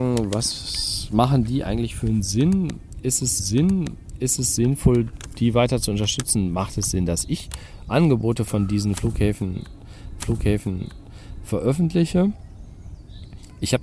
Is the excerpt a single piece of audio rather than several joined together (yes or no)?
no